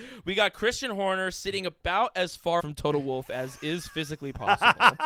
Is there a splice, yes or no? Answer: yes